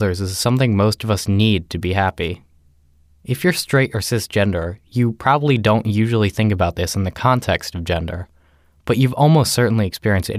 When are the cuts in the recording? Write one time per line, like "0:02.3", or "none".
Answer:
none